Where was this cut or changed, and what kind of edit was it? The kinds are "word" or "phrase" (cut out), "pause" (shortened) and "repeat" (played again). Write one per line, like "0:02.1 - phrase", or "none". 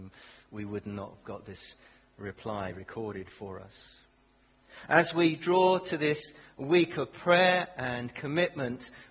none